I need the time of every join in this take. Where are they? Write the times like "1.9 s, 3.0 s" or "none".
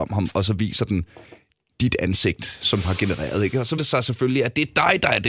1.7 s, 2.8 s, 3.8 s